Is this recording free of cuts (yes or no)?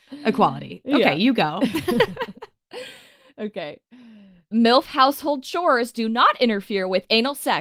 yes